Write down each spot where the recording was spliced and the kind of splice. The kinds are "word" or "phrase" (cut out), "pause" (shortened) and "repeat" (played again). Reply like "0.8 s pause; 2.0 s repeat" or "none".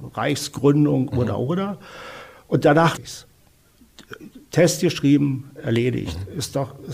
1.1 s word; 3.0 s word